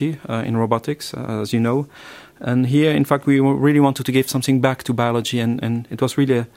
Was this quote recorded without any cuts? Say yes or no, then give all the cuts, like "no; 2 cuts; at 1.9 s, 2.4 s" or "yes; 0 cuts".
yes; 0 cuts